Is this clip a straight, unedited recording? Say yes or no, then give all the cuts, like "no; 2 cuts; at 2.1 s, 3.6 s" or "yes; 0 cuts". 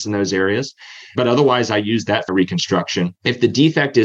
no; 1 cut; at 2.3 s